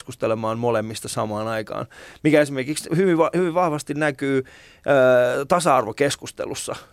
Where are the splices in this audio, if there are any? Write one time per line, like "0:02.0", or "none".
none